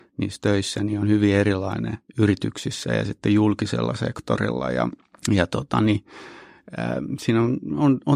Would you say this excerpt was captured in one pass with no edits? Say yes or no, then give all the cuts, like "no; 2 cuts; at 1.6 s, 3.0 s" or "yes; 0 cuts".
no; 2 cuts; at 2.1 s, 5.0 s